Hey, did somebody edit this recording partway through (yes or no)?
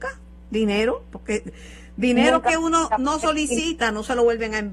no